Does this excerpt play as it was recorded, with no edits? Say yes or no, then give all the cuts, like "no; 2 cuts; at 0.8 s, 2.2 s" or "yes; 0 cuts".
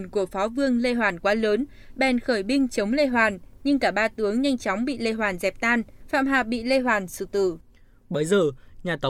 yes; 0 cuts